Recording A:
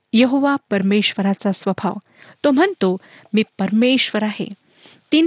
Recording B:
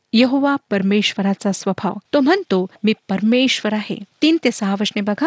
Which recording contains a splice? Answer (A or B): B